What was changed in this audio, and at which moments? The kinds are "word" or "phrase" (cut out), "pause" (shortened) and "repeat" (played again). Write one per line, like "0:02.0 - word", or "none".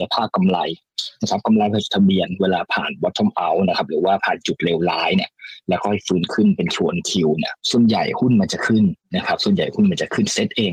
0:07.6 - pause
0:09.0 - pause